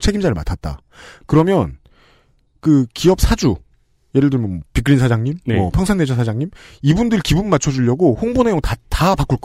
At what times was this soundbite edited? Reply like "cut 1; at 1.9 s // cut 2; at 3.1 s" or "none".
none